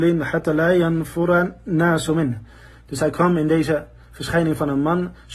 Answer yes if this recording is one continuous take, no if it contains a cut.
yes